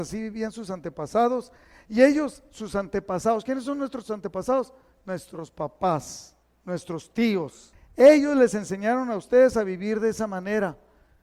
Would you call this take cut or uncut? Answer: uncut